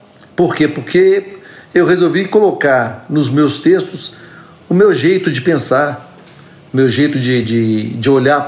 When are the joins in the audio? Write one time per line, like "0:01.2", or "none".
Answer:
none